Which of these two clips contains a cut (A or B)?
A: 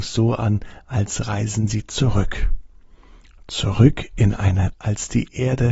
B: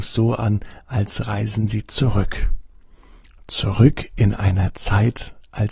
A